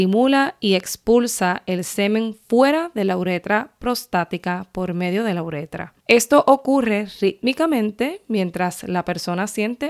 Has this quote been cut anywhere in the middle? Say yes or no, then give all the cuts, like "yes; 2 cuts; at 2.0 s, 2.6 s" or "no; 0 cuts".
yes; 1 cut; at 6.0 s